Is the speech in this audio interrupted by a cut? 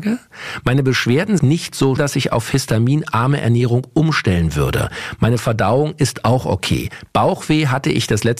yes; 2 cuts; at 1.4 s, 2.0 s

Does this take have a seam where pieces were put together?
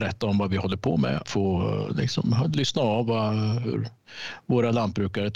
yes; 1 cut; at 1.2 s

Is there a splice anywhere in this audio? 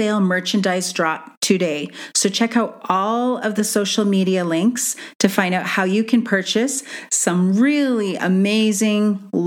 no; 0 cuts

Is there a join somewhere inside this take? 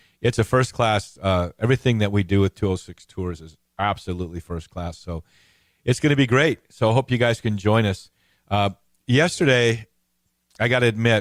no; 0 cuts

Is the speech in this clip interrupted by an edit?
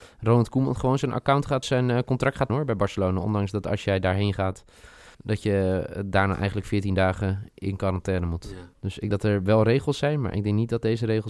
yes; 5 cuts; at 1.6 s, 2.5 s, 5.1 s, 8.7 s, 9.1 s

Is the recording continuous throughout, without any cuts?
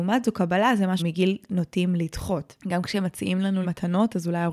no; 4 cuts; at 1.0 s, 1.4 s, 2.6 s, 3.6 s

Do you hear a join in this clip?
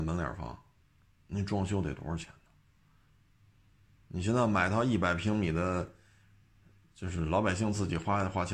no; 0 cuts

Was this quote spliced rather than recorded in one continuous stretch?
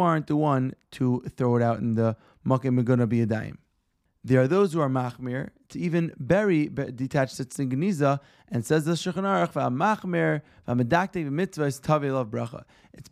no; 0 cuts

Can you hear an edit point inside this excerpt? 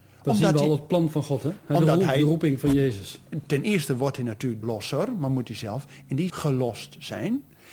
yes; 2 cuts; at 4.6 s, 6.3 s

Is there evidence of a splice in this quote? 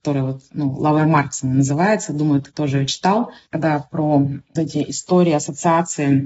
yes; 1 cut; at 4.6 s

